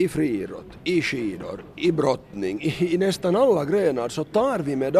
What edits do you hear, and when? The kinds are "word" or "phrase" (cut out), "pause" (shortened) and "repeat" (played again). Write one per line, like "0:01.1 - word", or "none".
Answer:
none